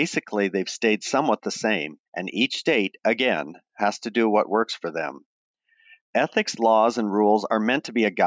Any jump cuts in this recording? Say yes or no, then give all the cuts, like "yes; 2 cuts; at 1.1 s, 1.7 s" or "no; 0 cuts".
yes; 1 cut; at 2.1 s